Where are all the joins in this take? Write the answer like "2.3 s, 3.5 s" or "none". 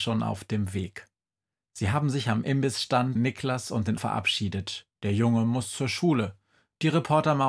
3.2 s, 4.0 s